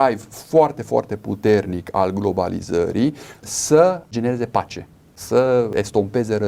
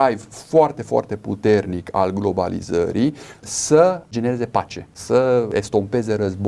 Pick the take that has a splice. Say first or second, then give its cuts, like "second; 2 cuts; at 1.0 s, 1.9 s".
second; 1 cut; at 4.9 s